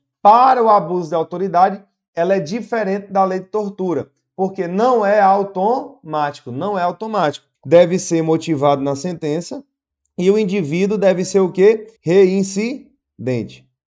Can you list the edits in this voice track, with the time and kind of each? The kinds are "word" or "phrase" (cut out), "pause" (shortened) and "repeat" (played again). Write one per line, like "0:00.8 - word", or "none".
0:07.5 - pause
0:09.9 - pause
0:12.0 - pause